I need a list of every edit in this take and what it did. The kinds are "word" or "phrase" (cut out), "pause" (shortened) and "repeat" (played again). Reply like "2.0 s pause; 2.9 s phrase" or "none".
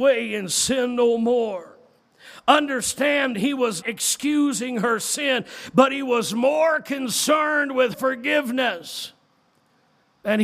3.3 s word; 3.8 s word; 7.9 s word